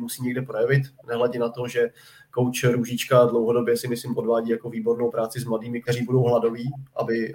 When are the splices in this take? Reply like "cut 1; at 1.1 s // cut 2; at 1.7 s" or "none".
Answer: cut 1; at 5.8 s